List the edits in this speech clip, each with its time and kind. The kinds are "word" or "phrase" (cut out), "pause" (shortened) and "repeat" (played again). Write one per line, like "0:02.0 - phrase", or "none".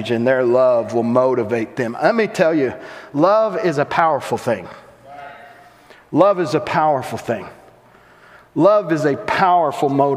none